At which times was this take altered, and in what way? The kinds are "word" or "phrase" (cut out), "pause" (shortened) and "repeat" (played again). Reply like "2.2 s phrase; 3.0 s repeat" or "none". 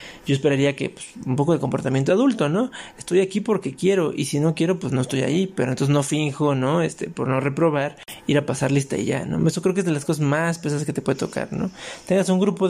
none